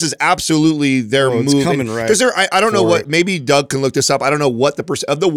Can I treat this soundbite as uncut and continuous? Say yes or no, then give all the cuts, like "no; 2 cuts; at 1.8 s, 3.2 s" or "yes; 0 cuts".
yes; 0 cuts